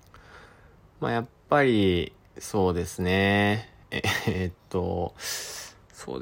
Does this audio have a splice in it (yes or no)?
yes